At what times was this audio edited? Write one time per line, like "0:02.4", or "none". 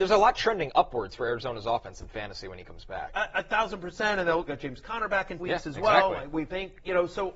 0:05.4